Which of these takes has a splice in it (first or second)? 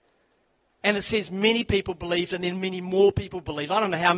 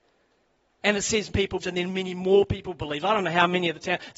second